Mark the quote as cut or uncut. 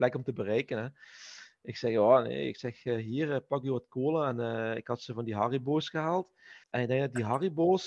cut